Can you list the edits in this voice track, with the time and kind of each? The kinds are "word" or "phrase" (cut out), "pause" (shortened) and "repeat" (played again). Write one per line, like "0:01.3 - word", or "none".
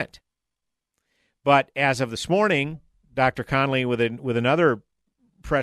none